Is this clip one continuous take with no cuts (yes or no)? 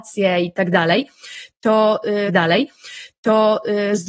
no